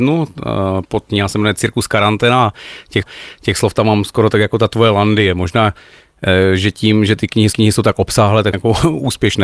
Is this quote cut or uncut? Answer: cut